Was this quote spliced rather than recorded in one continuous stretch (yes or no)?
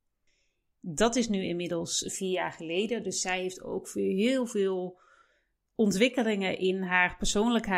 no